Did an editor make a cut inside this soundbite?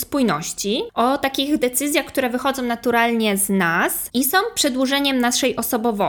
no; 0 cuts

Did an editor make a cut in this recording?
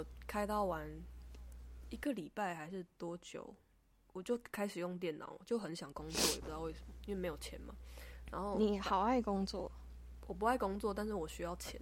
no; 0 cuts

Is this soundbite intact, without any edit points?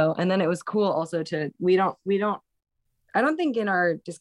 yes; 0 cuts

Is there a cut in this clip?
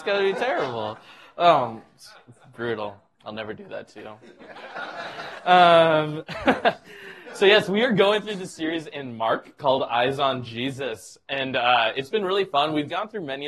no; 0 cuts

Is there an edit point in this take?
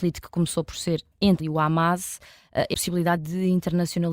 yes; 3 cuts; at 1.4 s, 2.7 s, 3.2 s

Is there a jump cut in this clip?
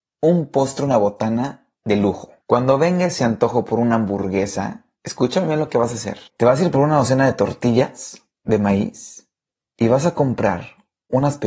yes; 2 cuts; at 2.4 s, 6.3 s

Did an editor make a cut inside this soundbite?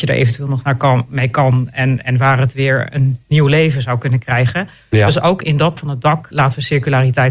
yes; 2 cuts; at 5.8 s, 6.3 s

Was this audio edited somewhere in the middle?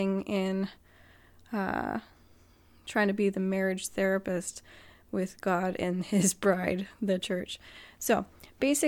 no; 0 cuts

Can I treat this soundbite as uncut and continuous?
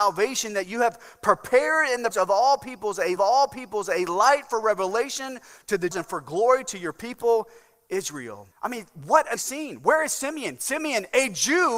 no; 5 cuts; at 2.1 s, 3.2 s, 5.9 s, 8.5 s, 9.4 s

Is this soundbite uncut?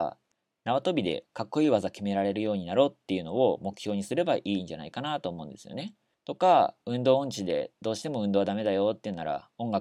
no; 1 cut; at 6.1 s

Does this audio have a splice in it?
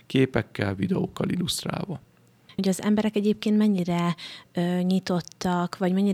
no; 0 cuts

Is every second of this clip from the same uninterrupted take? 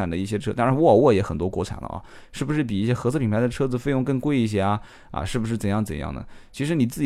yes; 0 cuts

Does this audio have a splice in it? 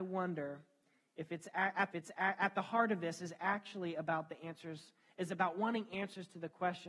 yes; 1 cut; at 1.9 s

